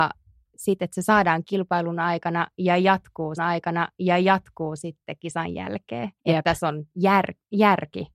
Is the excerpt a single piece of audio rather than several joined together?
no; 3 cuts; at 1.4 s, 3.4 s, 6.2 s

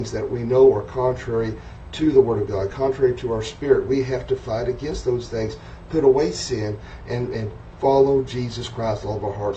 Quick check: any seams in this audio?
no; 0 cuts

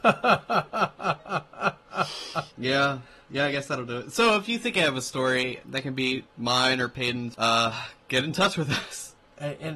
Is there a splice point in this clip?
yes; 1 cut; at 2.5 s

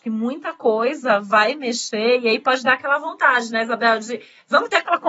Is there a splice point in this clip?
no; 0 cuts

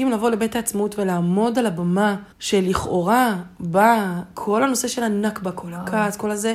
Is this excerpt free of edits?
no; 1 cut; at 2.3 s

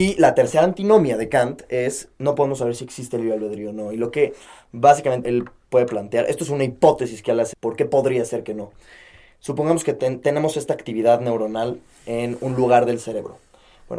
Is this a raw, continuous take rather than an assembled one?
no; 2 cuts; at 5.2 s, 7.5 s

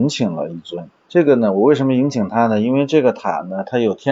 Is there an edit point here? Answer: yes; 1 cut; at 1.0 s

